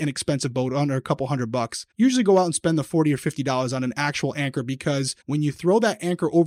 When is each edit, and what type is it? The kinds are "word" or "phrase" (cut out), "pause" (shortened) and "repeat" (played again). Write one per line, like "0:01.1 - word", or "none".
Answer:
0:01.9 - pause
0:05.2 - pause